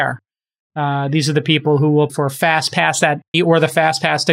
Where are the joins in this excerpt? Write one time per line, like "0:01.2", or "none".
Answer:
0:02.1
0:03.3